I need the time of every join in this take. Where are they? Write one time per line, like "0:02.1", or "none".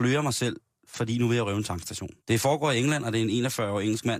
0:02.2